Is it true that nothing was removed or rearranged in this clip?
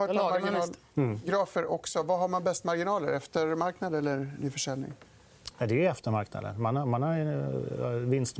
yes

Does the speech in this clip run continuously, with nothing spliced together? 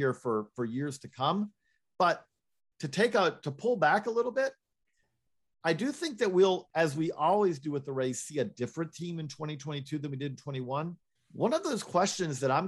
no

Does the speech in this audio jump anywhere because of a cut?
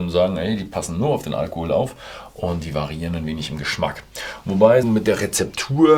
yes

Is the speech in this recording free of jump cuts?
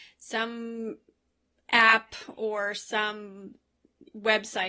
yes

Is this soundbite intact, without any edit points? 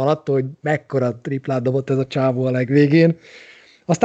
yes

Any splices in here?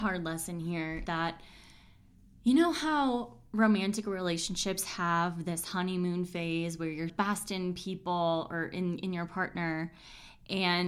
yes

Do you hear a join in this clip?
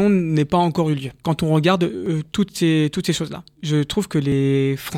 yes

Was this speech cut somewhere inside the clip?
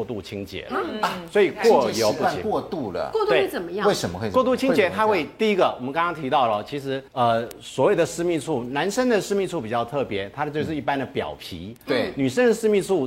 yes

